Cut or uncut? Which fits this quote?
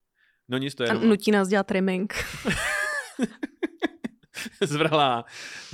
uncut